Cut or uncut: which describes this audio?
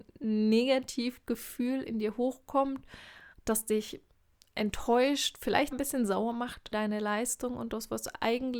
cut